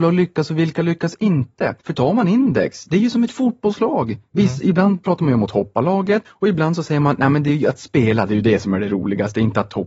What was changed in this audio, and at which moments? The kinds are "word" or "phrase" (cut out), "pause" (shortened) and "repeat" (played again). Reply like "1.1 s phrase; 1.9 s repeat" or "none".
1.8 s pause; 6.3 s pause